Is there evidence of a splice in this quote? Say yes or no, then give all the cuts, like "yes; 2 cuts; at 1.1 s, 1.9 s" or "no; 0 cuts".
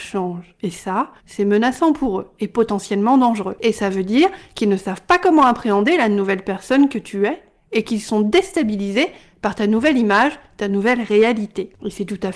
yes; 1 cut; at 1.2 s